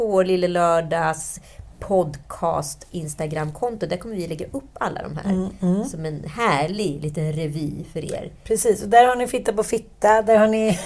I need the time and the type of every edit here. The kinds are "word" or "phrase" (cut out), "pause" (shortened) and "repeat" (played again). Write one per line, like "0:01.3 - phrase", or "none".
none